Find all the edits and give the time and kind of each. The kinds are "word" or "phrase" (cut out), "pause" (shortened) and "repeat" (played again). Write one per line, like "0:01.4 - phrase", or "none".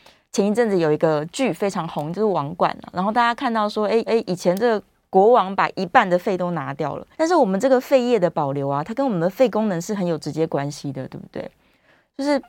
0:04.1 - repeat
0:07.1 - pause